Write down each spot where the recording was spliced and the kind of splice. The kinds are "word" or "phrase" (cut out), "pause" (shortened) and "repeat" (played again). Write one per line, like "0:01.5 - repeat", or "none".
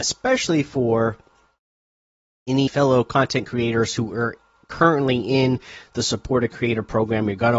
0:02.7 - phrase